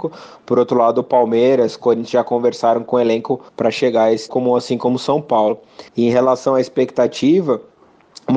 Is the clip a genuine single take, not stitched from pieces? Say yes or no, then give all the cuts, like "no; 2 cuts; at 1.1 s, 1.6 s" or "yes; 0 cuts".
no; 3 cuts; at 3.5 s, 4.3 s, 5.9 s